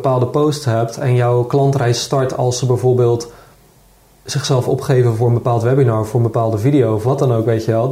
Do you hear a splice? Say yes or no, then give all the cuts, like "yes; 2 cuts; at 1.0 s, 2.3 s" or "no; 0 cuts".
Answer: no; 0 cuts